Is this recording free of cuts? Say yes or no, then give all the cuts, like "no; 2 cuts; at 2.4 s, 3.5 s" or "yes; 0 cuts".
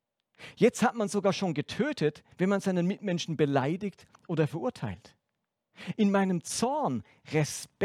no; 1 cut; at 2.3 s